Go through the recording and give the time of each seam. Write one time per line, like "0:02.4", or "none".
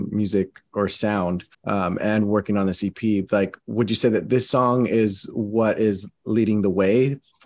0:01.5
0:03.6